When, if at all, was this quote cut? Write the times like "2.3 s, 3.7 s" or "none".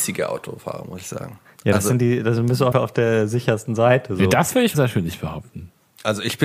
2.7 s, 4.7 s